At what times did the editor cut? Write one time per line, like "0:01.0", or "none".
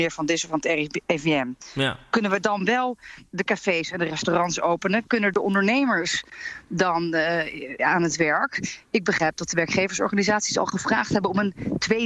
none